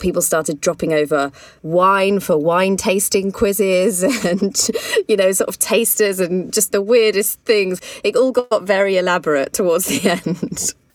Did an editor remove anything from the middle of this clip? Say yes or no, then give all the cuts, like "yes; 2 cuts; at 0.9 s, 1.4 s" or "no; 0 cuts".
yes; 1 cut; at 6.7 s